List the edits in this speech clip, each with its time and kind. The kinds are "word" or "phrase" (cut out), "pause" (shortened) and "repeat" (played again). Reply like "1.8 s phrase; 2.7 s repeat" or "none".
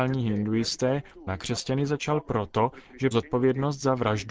1.3 s word; 3.1 s phrase